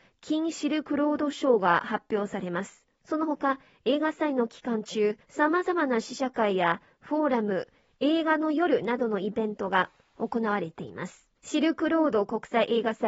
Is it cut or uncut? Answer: cut